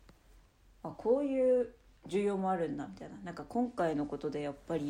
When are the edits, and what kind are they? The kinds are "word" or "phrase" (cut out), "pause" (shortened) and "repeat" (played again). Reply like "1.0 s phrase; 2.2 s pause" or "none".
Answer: 2.0 s pause